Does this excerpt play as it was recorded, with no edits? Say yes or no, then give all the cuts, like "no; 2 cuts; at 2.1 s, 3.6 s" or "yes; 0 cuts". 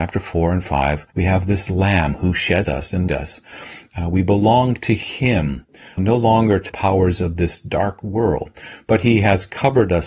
no; 5 cuts; at 1.1 s, 2.6 s, 3.1 s, 6.0 s, 6.7 s